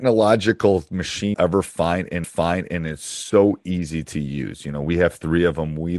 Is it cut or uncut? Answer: cut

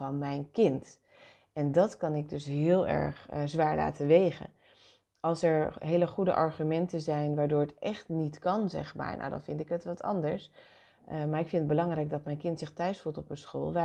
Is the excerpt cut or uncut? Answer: uncut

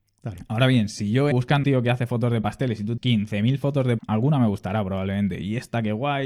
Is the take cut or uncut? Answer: cut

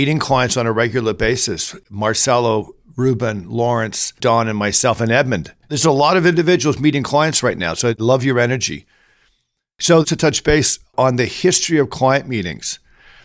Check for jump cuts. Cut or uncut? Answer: cut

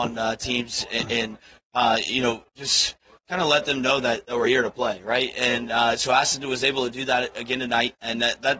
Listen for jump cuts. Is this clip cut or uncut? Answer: uncut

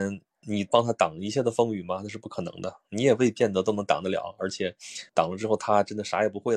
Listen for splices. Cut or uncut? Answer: cut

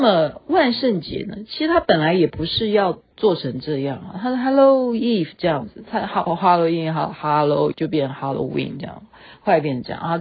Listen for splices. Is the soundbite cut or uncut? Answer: cut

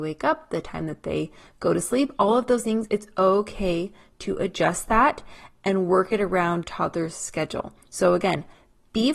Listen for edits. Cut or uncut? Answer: cut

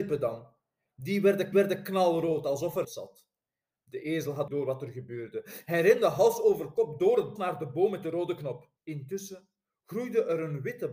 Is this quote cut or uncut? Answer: cut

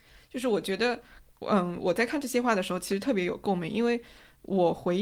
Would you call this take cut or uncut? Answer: uncut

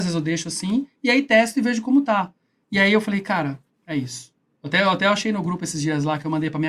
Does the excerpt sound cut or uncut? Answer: uncut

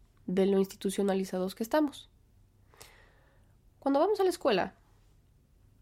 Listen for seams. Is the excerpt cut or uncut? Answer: uncut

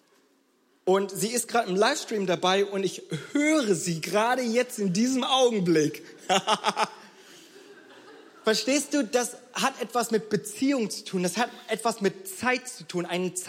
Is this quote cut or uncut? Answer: uncut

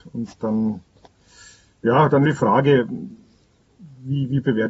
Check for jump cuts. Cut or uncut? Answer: cut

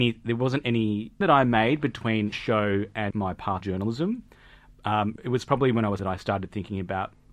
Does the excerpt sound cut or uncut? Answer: cut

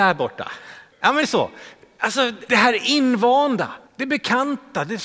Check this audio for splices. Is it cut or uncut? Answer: cut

